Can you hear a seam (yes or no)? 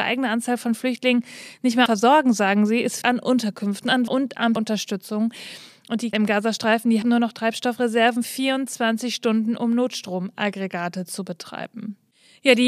yes